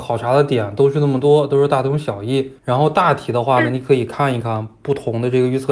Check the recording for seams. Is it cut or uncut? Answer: cut